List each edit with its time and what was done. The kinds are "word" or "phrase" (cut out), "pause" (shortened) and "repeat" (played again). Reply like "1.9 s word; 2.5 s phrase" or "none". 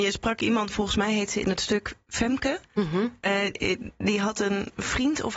none